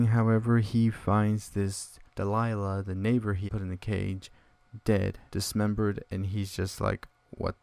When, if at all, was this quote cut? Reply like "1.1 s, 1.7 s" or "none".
2.1 s, 3.5 s, 5.3 s

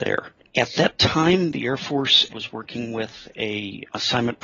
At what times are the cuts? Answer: 2.3 s

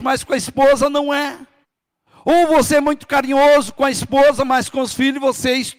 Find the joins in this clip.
1.6 s

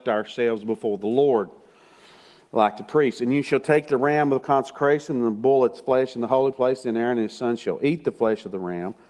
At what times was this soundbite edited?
none

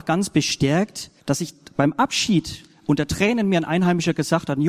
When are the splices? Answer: 1.2 s

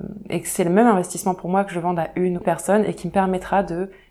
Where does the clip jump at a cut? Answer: 2.4 s

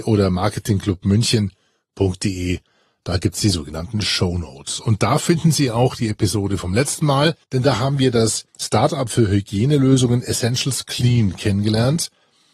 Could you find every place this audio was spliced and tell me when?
7.4 s

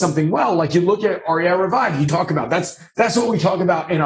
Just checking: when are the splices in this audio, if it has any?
2.1 s

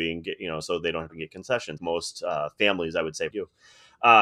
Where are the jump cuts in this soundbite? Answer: 1.1 s, 1.8 s, 3.3 s

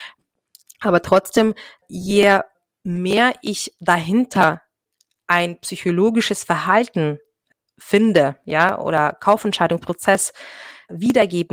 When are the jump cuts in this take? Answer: none

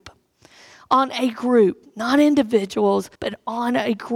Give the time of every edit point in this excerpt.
3.2 s

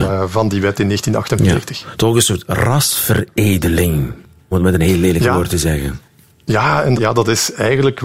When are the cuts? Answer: 4.5 s, 7.0 s

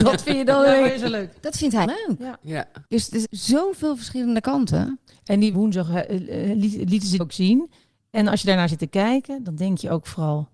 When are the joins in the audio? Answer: 1.8 s, 2.8 s, 3.2 s, 5.5 s, 7.2 s

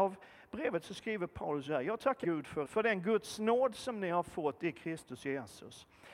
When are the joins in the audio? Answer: 2.2 s, 2.6 s

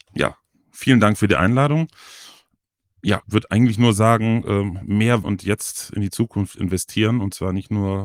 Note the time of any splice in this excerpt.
3.2 s, 5.2 s

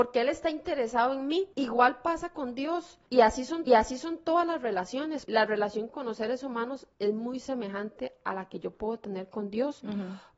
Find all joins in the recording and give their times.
1.5 s, 3.1 s, 3.7 s, 5.2 s, 5.9 s, 6.9 s

